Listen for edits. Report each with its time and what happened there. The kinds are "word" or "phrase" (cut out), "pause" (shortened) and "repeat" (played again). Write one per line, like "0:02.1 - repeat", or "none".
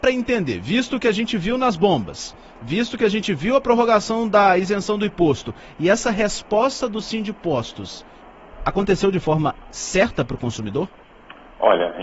none